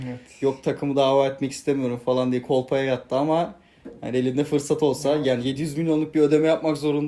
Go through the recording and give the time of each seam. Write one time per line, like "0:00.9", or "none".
none